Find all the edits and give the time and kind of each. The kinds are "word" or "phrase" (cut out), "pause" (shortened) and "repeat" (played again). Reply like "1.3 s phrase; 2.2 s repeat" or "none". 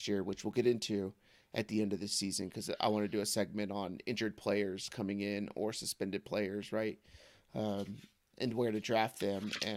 none